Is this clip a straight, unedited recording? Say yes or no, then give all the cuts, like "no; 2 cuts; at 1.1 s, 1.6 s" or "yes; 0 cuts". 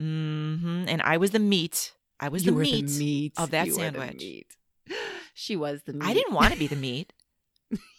yes; 0 cuts